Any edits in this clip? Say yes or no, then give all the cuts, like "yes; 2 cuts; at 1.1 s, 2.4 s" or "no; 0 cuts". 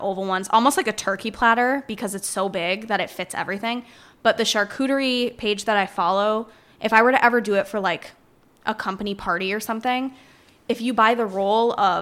no; 0 cuts